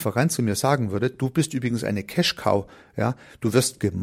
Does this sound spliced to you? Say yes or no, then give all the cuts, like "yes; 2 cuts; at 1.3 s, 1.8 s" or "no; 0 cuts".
no; 0 cuts